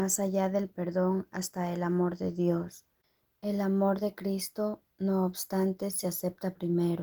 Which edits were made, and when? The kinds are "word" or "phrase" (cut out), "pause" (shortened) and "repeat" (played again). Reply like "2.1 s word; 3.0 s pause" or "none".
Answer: none